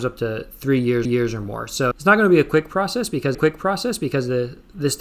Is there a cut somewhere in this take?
yes; 3 cuts; at 1.0 s, 1.9 s, 3.3 s

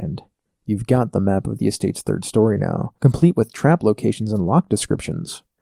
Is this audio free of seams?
yes; 0 cuts

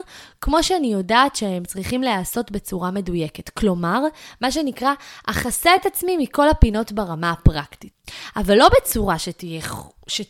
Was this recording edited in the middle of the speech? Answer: no; 0 cuts

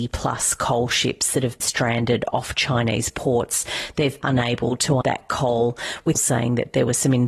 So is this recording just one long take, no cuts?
no; 4 cuts; at 1.6 s, 4.2 s, 5.0 s, 6.1 s

